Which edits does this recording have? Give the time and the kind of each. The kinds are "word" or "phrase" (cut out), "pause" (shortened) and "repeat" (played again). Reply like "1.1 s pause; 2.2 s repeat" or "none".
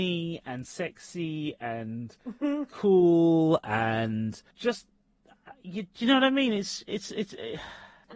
4.5 s pause